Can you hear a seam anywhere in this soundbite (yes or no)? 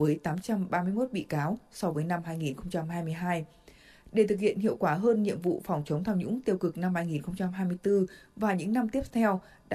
no